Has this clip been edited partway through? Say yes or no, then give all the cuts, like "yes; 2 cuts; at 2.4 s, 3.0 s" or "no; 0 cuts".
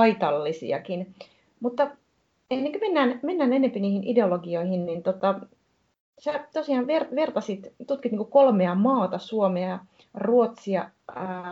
no; 0 cuts